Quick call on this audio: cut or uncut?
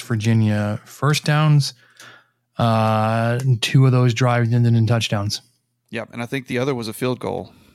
uncut